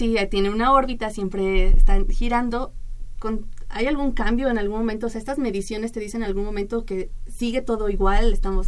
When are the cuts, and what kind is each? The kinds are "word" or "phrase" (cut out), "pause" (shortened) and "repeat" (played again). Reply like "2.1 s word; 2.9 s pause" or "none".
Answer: none